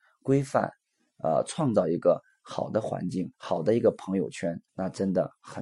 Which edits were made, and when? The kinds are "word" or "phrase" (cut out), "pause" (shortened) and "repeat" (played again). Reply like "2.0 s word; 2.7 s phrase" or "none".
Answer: 3.3 s pause; 4.7 s pause